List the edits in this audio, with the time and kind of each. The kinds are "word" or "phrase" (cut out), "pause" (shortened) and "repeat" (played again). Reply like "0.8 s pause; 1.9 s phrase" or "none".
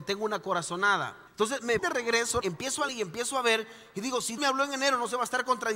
1.3 s pause; 1.8 s word; 2.4 s word; 2.9 s word; 4.4 s word